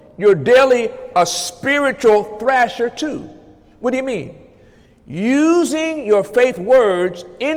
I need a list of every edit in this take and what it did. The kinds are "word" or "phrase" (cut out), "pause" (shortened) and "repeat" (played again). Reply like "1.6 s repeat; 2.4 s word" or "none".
none